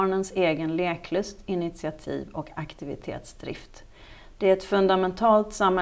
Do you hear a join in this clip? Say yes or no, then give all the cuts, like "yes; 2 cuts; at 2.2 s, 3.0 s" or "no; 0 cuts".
no; 0 cuts